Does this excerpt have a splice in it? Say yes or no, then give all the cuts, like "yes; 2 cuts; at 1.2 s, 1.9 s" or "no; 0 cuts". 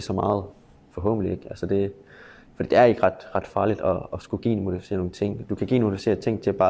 no; 0 cuts